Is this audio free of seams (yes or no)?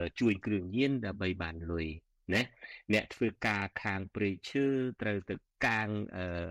yes